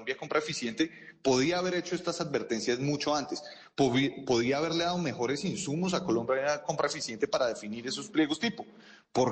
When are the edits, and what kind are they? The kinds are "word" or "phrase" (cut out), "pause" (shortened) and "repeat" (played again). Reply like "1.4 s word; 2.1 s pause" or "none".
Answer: none